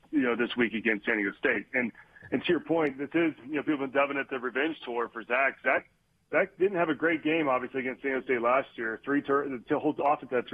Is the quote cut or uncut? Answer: uncut